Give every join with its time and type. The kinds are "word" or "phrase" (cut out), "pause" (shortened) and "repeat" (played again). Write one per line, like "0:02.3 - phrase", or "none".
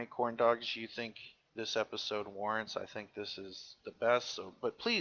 none